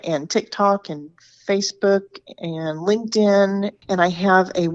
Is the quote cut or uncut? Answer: uncut